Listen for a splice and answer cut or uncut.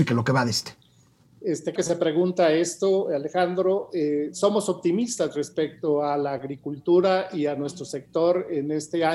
cut